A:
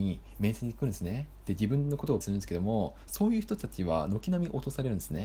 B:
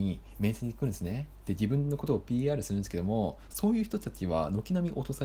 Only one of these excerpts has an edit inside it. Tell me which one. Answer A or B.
A